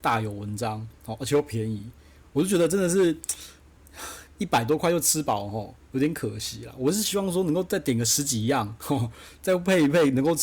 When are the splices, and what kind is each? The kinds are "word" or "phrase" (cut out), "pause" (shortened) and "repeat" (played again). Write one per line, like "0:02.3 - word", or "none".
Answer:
0:04.3 - pause